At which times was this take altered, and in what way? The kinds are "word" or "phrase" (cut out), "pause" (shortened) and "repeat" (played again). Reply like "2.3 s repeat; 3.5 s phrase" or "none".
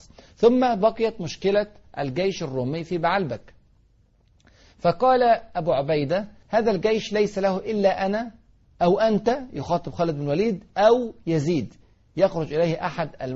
6.4 s pause